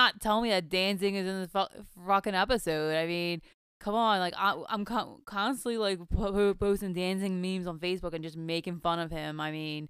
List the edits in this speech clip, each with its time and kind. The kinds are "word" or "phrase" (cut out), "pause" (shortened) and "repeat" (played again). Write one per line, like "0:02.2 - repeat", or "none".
none